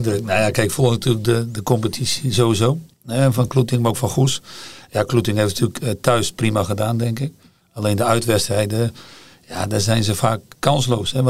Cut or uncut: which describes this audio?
uncut